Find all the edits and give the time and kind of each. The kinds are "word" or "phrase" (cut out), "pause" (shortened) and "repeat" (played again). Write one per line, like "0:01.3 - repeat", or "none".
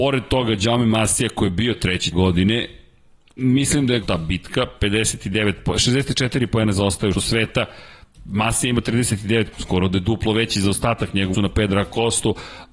0:02.1 - word
0:04.0 - word
0:07.1 - word
0:09.5 - word
0:11.3 - word